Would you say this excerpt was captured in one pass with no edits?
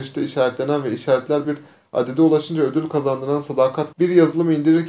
no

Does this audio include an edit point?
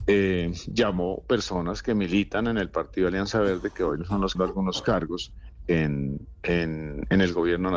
yes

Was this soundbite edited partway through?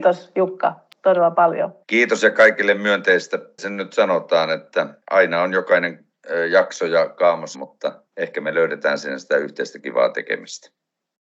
yes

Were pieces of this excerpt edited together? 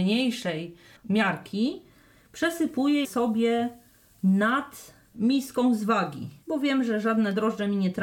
yes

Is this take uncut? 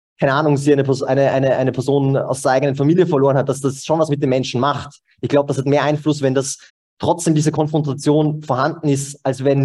no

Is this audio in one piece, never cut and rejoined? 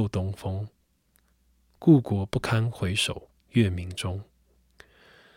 no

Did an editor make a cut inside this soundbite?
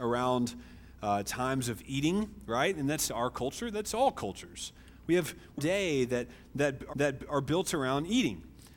yes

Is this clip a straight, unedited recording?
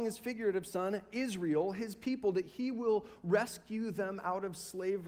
yes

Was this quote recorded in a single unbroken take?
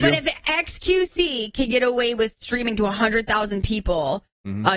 yes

